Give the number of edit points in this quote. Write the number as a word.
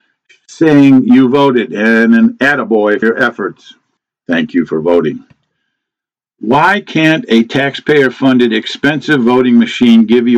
two